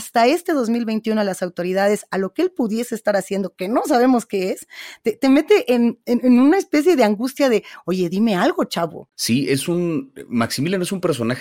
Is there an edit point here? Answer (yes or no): no